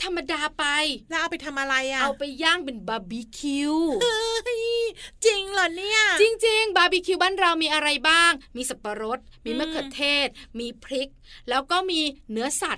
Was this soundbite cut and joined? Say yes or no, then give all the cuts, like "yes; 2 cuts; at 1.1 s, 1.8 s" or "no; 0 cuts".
no; 0 cuts